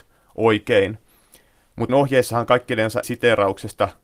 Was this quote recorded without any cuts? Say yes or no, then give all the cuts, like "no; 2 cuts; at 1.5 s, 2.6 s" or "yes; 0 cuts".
no; 2 cuts; at 1.9 s, 3.0 s